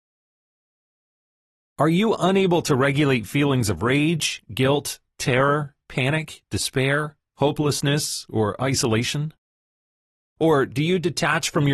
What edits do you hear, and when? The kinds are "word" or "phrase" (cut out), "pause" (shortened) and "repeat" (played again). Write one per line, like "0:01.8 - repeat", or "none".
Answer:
none